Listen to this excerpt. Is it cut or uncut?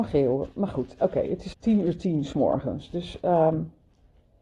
cut